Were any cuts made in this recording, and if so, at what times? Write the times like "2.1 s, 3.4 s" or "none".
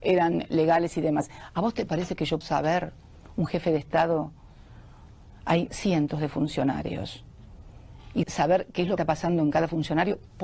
2.4 s, 5.7 s, 8.2 s, 9.0 s